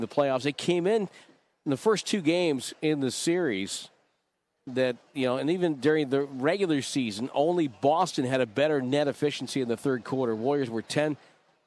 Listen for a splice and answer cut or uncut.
uncut